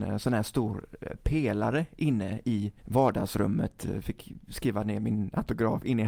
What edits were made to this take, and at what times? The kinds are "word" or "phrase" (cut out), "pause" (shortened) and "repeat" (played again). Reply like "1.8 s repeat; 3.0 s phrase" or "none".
2.8 s pause

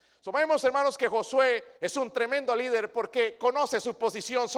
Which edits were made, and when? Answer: 1.8 s pause

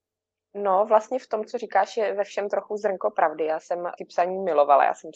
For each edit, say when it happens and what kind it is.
4.0 s word

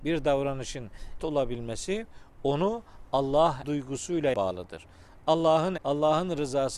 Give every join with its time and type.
1.2 s word; 3.6 s word; 4.3 s word; 5.8 s word

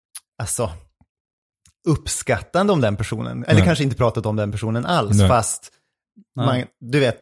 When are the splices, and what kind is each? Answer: none

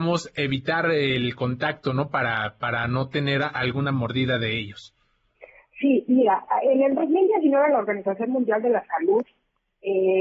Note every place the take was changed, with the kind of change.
none

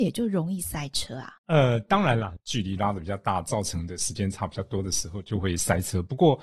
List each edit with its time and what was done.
1.4 s pause

